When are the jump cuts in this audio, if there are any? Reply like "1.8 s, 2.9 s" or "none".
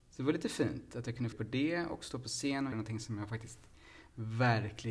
1.3 s, 2.7 s

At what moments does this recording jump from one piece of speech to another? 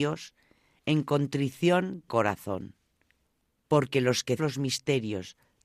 2.1 s, 3.2 s, 4.4 s

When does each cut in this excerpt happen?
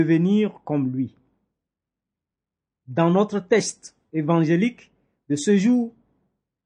none

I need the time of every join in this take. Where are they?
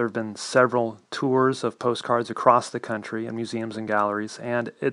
none

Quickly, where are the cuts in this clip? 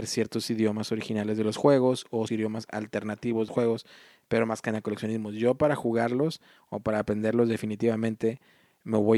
2.3 s, 3.5 s

